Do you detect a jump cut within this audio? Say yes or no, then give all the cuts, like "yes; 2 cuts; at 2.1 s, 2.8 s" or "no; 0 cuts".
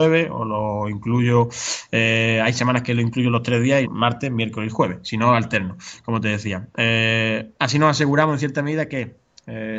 yes; 1 cut; at 3.8 s